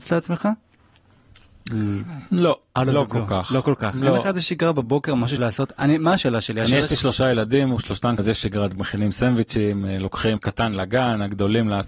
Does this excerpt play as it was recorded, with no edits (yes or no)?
no